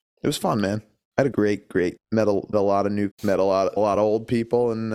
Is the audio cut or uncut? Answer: cut